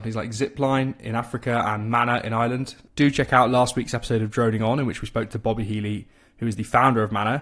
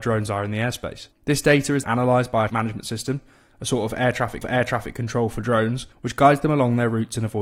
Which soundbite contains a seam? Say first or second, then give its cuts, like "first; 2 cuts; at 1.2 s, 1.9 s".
second; 5 cuts; at 1.1 s, 1.8 s, 2.5 s, 4.4 s, 5.9 s